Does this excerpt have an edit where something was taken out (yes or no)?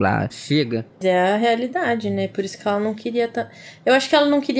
yes